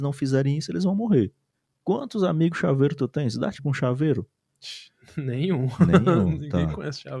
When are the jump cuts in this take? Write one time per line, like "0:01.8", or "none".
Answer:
0:03.6